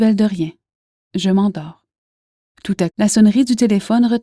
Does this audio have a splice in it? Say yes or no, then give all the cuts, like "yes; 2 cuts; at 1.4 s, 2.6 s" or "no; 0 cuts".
yes; 1 cut; at 2.9 s